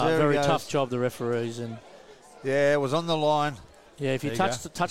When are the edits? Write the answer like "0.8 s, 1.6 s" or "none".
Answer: none